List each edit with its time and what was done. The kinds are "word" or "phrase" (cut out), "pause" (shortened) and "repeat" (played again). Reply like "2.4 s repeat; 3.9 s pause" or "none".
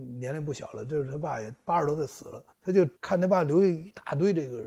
2.5 s pause; 3.0 s pause